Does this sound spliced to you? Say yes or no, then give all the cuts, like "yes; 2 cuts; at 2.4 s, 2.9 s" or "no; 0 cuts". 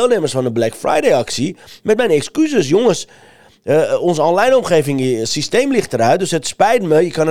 no; 0 cuts